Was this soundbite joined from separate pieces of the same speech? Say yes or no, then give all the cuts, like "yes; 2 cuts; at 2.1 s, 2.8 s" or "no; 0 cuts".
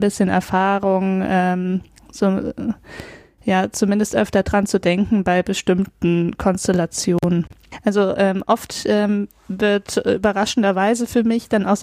no; 0 cuts